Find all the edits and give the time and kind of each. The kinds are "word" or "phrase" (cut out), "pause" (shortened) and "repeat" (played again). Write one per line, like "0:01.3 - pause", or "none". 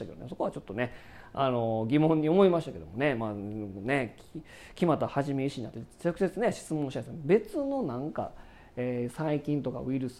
none